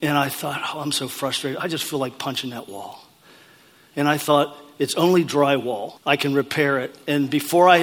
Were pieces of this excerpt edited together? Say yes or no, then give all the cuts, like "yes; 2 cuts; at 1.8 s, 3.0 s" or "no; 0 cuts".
yes; 1 cut; at 6.0 s